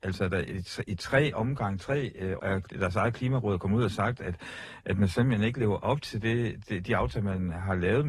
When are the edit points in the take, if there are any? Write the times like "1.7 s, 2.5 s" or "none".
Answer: 2.4 s